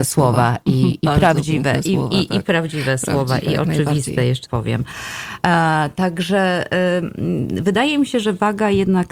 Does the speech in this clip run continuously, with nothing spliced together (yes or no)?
no